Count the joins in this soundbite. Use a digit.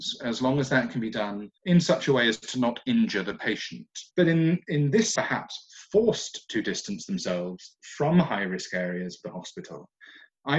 3